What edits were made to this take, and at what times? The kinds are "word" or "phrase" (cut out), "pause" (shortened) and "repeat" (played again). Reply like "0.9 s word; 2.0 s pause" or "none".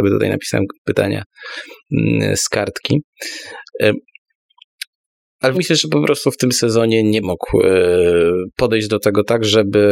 5.5 s word; 7.2 s word

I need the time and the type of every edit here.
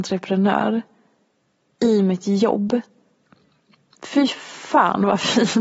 none

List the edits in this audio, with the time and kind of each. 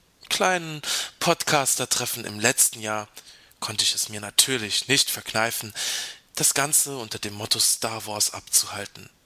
none

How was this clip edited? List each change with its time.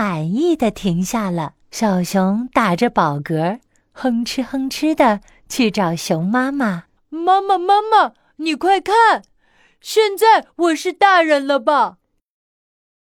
1.6 s pause; 7.0 s pause

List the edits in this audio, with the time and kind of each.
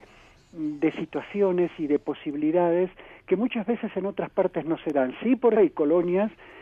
5.6 s word

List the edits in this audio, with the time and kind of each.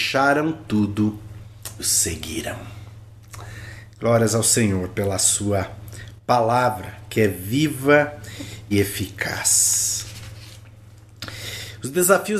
1.8 s word; 8.7 s word

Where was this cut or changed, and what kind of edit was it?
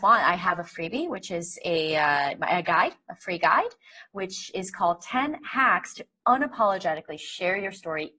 none

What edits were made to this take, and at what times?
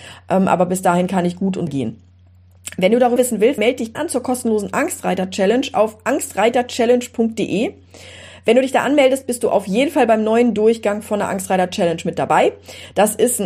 1.7 s word; 3.2 s word; 3.6 s word; 3.9 s word

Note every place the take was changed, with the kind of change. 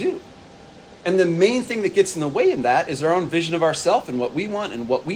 none

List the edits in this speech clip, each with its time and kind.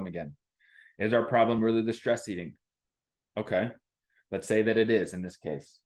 none

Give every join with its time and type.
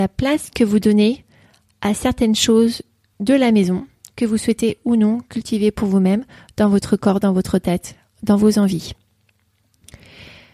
none

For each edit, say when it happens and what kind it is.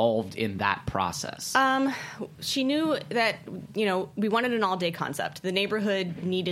none

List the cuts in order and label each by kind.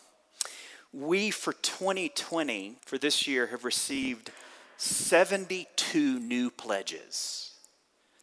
2.8 s pause

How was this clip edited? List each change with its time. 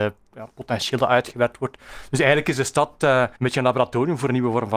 3.3 s pause

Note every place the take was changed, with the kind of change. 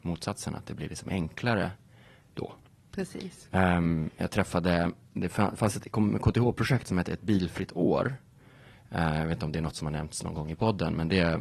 none

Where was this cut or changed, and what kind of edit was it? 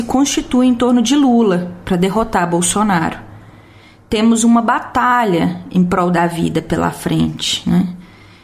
none

